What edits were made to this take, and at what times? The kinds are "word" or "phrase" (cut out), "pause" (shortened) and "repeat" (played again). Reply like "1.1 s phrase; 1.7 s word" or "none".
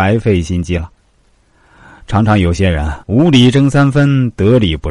3.0 s pause